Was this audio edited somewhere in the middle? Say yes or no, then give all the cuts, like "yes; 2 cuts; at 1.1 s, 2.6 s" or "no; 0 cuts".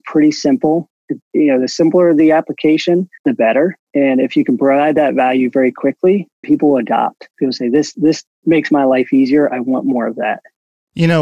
yes; 3 cuts; at 3.2 s, 3.9 s, 6.4 s